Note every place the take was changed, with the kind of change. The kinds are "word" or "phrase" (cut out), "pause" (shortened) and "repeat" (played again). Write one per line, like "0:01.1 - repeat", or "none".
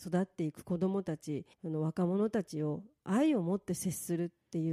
0:01.5 - pause